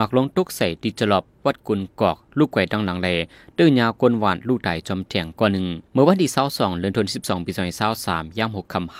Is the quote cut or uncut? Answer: cut